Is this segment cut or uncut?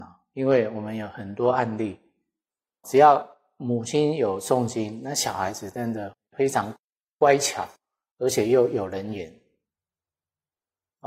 cut